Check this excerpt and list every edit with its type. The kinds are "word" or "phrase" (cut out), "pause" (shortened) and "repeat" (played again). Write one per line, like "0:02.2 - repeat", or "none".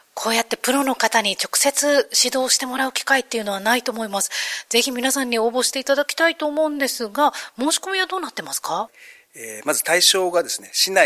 none